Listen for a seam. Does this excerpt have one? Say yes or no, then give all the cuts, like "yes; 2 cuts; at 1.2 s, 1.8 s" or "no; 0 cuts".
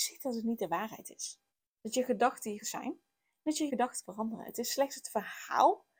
yes; 4 cuts; at 1.5 s, 2.6 s, 3.7 s, 4.0 s